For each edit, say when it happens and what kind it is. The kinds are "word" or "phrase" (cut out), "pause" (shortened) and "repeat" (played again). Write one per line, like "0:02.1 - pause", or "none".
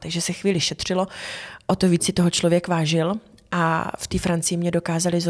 none